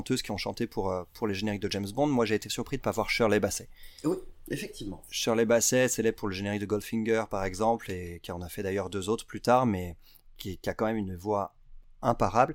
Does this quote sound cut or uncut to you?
uncut